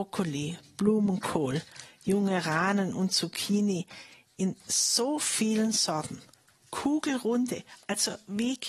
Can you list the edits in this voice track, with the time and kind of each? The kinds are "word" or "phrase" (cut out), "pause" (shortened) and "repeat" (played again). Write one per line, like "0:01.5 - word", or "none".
none